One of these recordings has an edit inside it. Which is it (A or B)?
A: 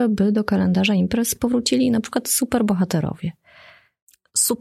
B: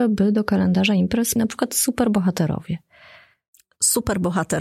B